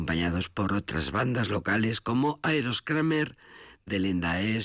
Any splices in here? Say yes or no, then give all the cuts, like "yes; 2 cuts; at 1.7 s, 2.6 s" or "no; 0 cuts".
no; 0 cuts